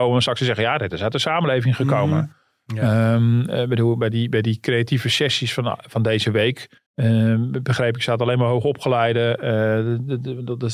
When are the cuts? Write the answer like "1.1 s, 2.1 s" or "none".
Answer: 6.9 s

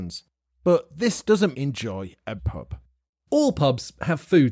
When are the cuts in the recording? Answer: 1.5 s, 2.4 s

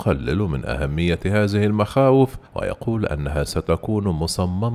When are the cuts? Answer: 2.5 s

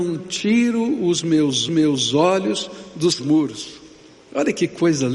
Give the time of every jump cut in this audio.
1.7 s, 3.2 s

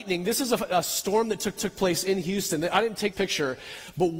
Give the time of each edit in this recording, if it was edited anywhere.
1.6 s, 3.1 s

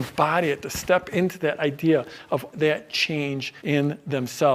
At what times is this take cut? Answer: 2.5 s, 3.6 s

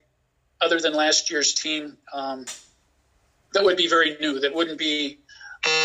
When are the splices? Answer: 2.0 s

